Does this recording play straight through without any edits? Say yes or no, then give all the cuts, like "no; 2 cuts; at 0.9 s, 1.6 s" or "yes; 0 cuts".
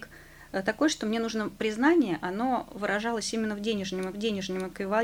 no; 1 cut; at 4.1 s